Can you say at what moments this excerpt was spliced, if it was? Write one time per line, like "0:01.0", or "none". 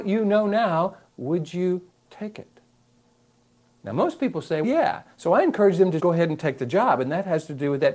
0:04.6
0:06.0